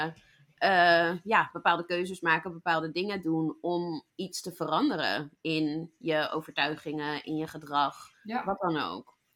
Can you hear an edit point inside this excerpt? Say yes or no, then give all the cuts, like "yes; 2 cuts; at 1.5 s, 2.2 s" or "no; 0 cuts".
yes; 2 cuts; at 4.1 s, 8.1 s